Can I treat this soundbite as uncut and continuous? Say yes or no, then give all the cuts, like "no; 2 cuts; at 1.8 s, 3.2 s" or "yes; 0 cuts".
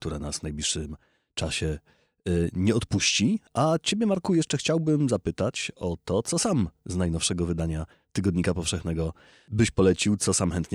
yes; 0 cuts